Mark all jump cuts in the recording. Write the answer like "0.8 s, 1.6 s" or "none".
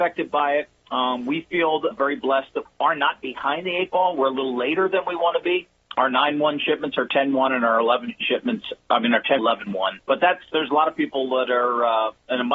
1.9 s, 2.6 s, 8.2 s, 9.4 s, 10.0 s